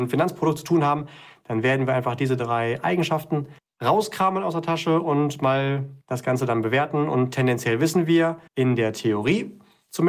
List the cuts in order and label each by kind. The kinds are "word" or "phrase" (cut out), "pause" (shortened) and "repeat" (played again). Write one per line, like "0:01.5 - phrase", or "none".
0:03.6 - pause
0:06.0 - pause
0:08.5 - pause